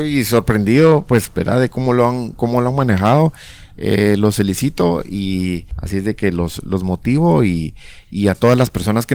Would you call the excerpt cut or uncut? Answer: uncut